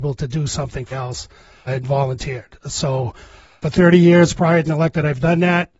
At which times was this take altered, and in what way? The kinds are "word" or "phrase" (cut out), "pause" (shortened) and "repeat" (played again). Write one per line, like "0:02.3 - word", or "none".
0:00.9 - word
0:01.7 - word
0:03.6 - word
0:04.7 - word